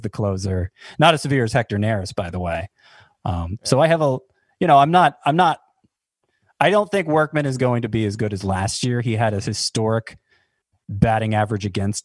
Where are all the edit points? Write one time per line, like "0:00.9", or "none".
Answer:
none